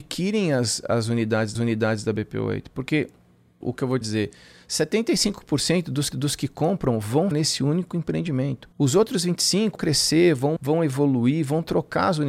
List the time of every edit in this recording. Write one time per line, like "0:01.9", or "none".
0:01.5
0:03.6
0:04.0
0:06.1
0:07.3
0:08.7
0:09.8
0:10.6